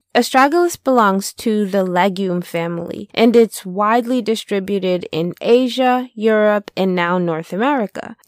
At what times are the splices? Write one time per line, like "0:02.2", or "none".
none